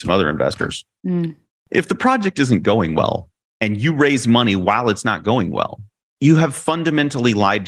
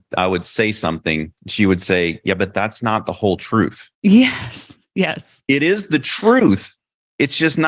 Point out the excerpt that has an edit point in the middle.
second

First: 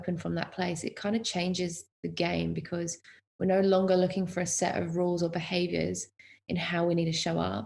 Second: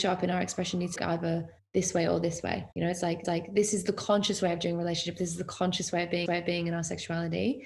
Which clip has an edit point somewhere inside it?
second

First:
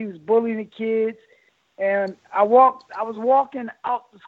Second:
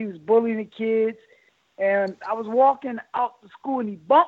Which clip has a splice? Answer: second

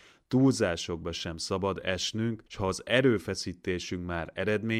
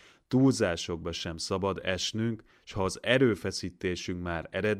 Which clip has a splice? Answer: first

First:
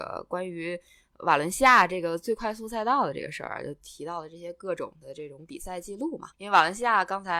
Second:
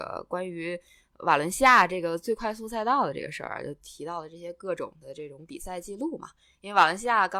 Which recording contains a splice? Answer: first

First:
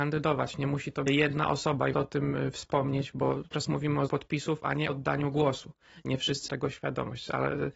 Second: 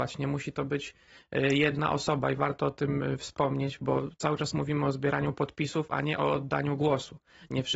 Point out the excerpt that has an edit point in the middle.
first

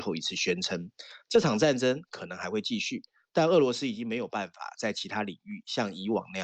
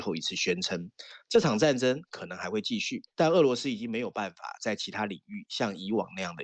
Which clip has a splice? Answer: second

